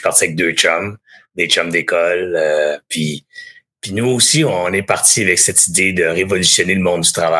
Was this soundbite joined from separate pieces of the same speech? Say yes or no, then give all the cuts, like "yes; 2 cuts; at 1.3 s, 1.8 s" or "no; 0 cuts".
no; 0 cuts